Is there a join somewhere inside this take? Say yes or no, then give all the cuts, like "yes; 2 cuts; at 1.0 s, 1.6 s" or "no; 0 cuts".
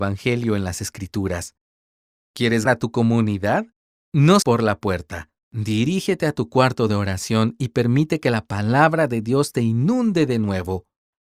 yes; 3 cuts; at 2.7 s, 4.4 s, 5.4 s